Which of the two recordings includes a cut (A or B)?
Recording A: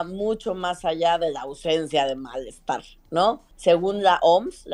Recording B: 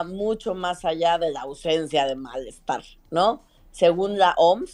A